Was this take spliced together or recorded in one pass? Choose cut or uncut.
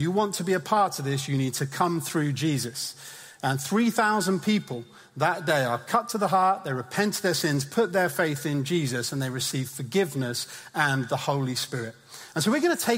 uncut